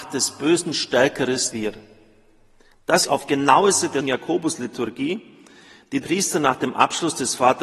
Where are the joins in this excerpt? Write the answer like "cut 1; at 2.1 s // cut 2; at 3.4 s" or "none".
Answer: cut 1; at 1.5 s // cut 2; at 3.0 s // cut 3; at 4.0 s // cut 4; at 6.0 s